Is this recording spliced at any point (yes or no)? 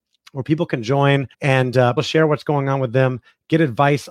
yes